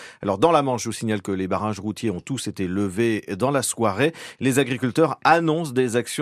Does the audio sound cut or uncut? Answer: uncut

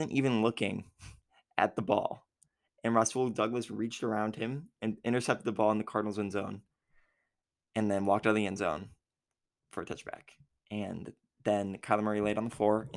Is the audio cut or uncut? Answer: uncut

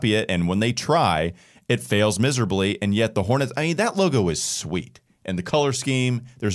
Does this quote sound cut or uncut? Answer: uncut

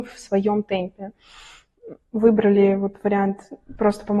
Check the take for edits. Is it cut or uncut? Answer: uncut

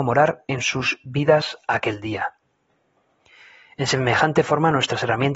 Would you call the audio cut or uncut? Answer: uncut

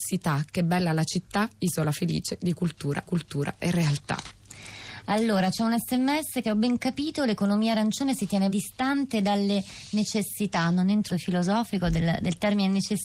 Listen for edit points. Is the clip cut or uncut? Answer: cut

